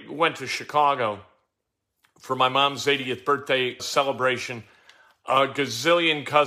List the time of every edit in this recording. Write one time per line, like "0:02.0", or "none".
0:03.8